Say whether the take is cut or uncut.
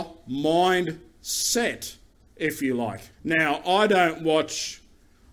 cut